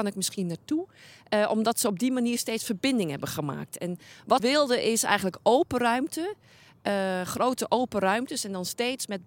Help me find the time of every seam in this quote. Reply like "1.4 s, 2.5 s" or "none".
4.4 s